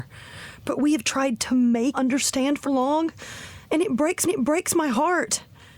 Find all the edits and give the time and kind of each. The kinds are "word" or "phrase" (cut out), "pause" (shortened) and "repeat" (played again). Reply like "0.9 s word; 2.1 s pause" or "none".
1.9 s word; 2.6 s word; 4.2 s repeat